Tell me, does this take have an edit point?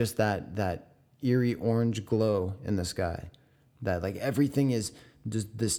no; 0 cuts

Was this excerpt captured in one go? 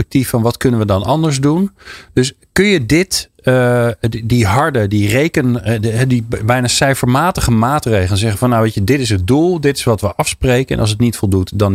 yes; 0 cuts

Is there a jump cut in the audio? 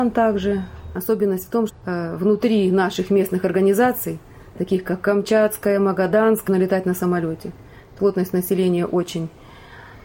yes; 3 cuts; at 1.7 s, 6.5 s, 8.0 s

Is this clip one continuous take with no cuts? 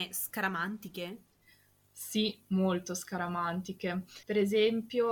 no; 1 cut; at 4.2 s

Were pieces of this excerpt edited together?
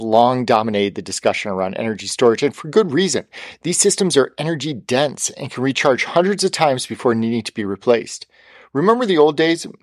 no; 0 cuts

